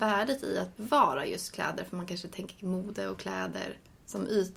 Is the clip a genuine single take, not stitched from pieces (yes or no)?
yes